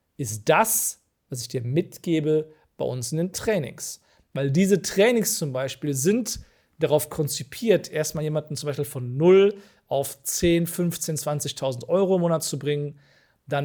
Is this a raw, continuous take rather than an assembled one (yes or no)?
yes